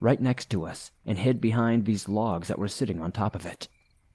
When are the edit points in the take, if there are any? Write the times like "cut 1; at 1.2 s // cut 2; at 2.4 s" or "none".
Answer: none